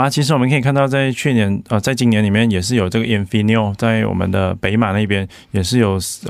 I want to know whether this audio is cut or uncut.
uncut